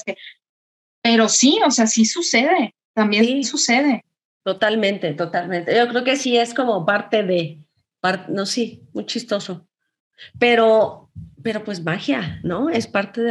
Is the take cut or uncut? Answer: cut